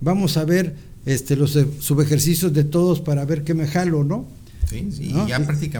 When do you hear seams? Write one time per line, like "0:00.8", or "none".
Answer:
none